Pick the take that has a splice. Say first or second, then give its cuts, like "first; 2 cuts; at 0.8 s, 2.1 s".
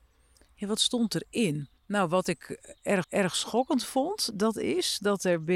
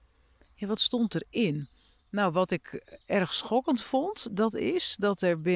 first; 2 cuts; at 1.8 s, 3.0 s